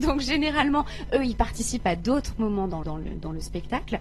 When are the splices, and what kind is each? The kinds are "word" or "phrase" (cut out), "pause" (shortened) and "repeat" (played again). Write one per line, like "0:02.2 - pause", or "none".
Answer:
0:02.8 - word